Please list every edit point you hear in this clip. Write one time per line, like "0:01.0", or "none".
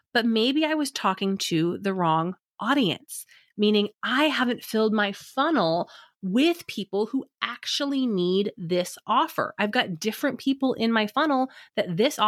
none